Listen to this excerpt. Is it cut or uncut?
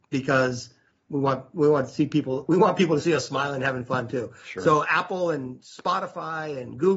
cut